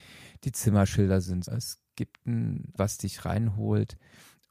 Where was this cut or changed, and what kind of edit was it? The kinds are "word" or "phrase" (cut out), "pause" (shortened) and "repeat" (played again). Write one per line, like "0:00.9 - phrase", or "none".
0:01.4 - word
0:02.8 - word